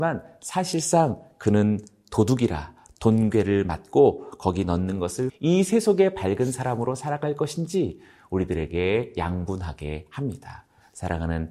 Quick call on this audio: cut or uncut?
cut